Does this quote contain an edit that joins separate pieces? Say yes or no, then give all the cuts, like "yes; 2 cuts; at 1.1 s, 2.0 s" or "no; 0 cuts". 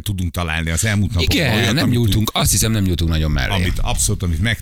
no; 0 cuts